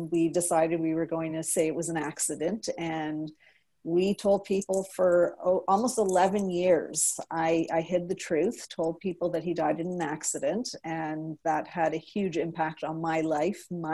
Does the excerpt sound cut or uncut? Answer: uncut